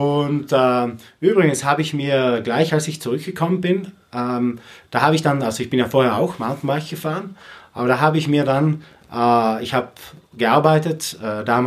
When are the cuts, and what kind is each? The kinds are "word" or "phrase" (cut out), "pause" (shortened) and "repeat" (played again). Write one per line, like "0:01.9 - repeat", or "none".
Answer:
none